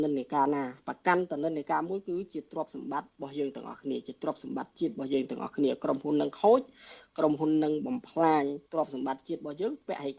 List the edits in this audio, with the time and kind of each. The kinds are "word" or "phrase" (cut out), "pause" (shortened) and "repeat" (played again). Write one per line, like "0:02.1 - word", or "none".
0:08.7 - pause